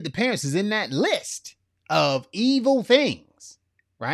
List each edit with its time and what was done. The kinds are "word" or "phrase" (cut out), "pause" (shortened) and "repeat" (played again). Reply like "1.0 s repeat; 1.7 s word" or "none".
none